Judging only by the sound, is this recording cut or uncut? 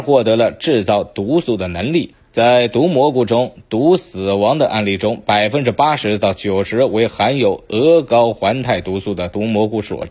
uncut